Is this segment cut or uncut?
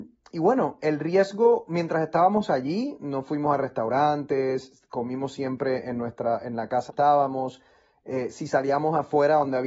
cut